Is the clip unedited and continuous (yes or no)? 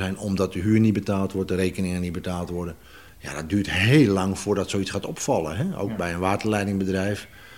yes